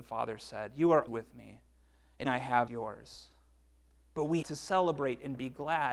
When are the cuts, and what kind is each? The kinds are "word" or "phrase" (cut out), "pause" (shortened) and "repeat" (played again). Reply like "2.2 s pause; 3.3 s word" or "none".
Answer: 1.1 s word; 2.3 s word; 2.7 s word; 4.4 s word